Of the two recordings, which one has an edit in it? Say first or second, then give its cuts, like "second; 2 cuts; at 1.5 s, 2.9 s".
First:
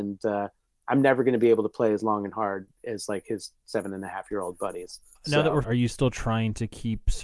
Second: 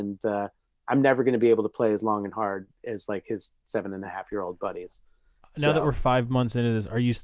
first; 2 cuts; at 5.1 s, 5.6 s